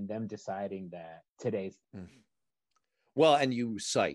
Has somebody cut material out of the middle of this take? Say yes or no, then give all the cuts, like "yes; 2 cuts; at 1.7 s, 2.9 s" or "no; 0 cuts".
yes; 2 cuts; at 1.3 s, 1.8 s